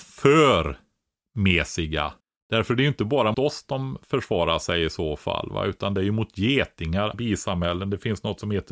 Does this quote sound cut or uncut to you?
cut